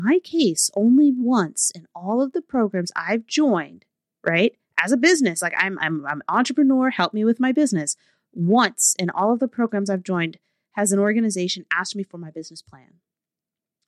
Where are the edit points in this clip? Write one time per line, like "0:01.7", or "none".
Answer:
none